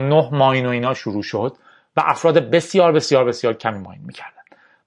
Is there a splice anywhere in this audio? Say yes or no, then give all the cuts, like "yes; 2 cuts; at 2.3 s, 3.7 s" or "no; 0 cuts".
no; 0 cuts